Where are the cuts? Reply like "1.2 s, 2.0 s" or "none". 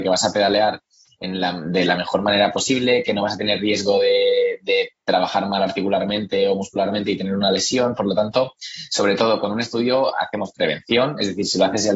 none